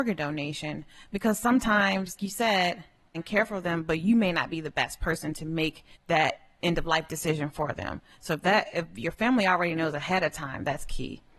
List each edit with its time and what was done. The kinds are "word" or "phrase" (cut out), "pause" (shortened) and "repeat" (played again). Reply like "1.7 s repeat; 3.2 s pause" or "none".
2.2 s word; 3.1 s phrase; 5.9 s pause